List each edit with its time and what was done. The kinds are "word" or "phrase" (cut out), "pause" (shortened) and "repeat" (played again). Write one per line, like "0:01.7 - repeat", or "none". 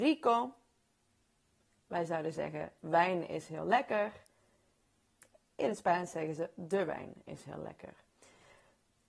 none